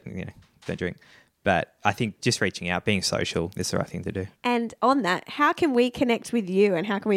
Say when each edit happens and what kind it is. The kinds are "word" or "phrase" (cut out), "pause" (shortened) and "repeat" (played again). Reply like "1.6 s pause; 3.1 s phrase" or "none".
4.4 s pause